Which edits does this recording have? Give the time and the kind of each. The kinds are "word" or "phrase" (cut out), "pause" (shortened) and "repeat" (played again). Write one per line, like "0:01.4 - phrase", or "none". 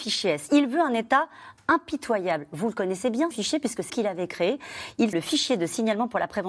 0:03.3 - word
0:03.9 - word
0:05.1 - word